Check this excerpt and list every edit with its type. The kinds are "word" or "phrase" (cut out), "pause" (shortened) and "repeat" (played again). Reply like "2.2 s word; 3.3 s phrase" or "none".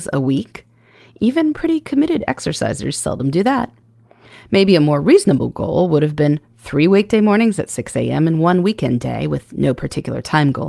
none